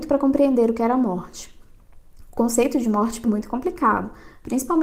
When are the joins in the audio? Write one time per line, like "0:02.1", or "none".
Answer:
0:03.2